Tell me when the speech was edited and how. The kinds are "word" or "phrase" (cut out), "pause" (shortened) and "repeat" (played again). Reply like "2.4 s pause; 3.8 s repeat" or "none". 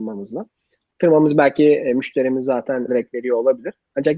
2.9 s phrase